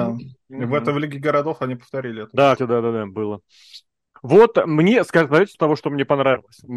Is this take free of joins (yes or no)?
no